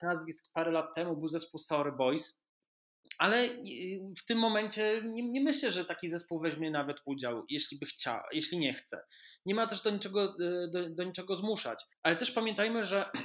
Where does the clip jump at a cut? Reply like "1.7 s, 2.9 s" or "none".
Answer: 11.9 s